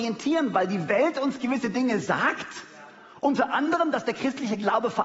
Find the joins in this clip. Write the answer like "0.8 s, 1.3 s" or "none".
none